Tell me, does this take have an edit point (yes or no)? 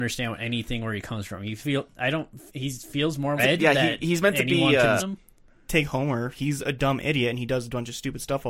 yes